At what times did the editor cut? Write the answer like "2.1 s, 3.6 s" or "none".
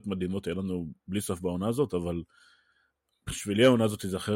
none